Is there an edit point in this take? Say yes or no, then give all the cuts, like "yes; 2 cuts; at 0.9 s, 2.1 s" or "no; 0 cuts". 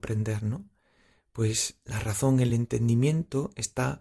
no; 0 cuts